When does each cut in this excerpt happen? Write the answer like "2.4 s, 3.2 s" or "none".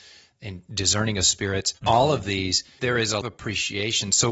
1.8 s, 2.8 s, 3.2 s